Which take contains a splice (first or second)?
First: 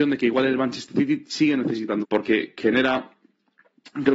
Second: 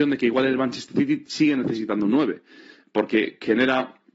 first